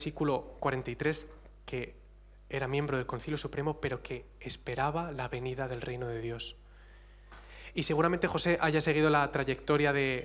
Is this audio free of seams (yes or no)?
yes